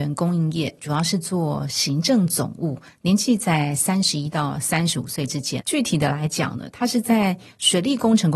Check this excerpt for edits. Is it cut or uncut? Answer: cut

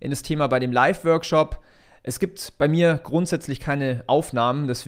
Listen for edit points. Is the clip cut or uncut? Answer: uncut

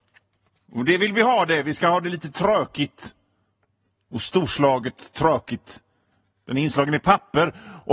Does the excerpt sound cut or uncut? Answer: uncut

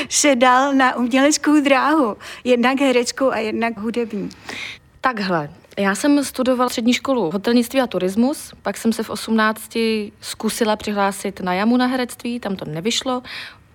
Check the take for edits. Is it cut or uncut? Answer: cut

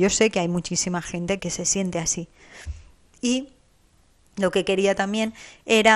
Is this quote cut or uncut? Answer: cut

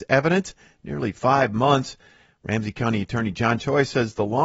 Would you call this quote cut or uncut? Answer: uncut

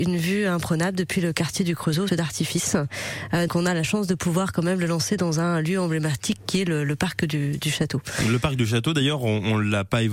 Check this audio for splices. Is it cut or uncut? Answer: cut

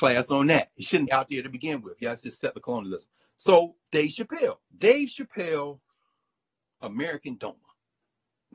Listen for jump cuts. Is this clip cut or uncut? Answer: cut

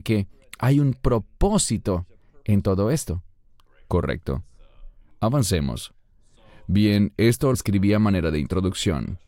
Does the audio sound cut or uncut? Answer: cut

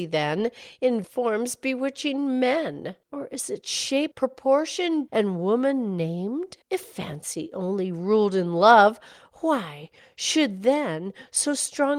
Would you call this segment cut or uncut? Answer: cut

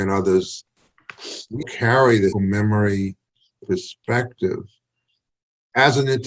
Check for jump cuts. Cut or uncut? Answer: cut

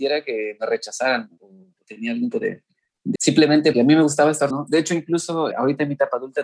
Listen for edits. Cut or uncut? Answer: cut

